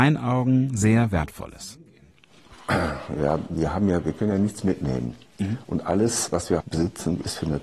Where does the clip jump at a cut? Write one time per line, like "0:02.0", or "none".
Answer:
0:06.6